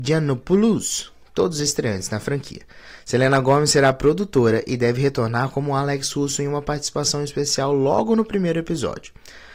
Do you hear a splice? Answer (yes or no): no